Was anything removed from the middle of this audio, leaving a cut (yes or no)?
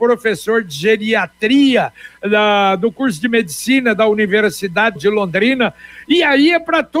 yes